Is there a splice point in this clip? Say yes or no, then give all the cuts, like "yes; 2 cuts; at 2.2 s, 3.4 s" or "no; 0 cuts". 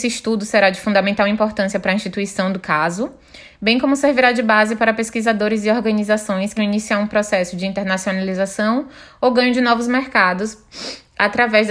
yes; 1 cut; at 6.6 s